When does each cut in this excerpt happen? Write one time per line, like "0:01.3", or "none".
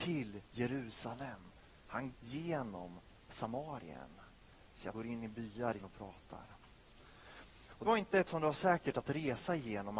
0:02.1
0:04.9
0:05.8
0:07.9
0:08.3